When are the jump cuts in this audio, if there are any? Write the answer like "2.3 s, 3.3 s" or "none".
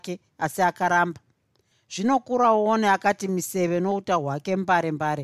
none

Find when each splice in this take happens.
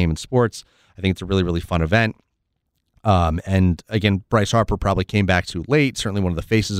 none

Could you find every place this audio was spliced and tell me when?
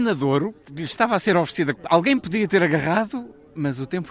1.8 s

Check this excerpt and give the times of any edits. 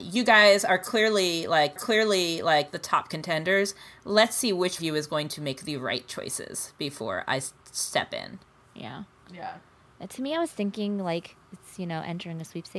1.8 s, 4.8 s, 8.5 s

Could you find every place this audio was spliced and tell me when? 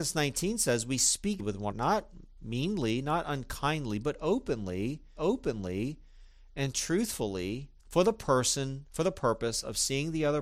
1.4 s, 1.7 s, 5.2 s, 7.8 s, 8.9 s

